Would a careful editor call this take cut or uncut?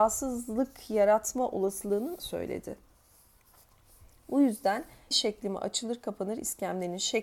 cut